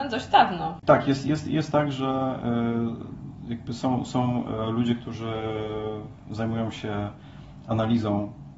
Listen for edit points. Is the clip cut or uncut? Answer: uncut